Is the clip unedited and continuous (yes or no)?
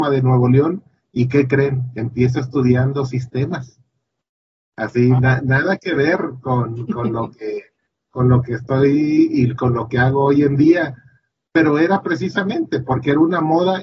yes